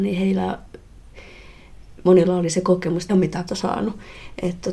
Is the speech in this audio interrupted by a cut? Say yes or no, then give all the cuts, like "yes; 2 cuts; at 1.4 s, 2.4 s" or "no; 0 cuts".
yes; 2 cuts; at 3.1 s, 3.5 s